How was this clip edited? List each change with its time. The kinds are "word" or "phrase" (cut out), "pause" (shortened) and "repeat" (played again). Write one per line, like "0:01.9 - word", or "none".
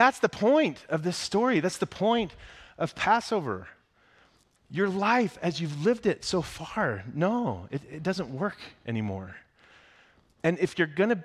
none